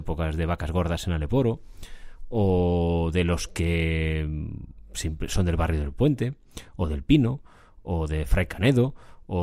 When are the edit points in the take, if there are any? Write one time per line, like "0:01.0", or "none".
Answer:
none